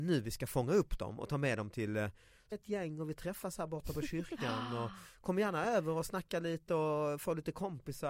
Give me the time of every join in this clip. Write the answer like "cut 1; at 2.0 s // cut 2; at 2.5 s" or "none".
cut 1; at 2.5 s